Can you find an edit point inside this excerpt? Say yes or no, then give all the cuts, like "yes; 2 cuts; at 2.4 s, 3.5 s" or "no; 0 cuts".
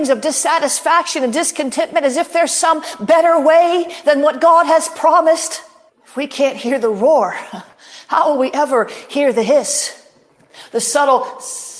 yes; 1 cut; at 5.9 s